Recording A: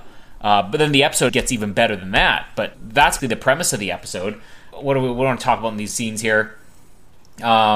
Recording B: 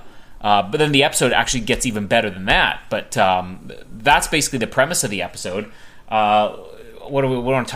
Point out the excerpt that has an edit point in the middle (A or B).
A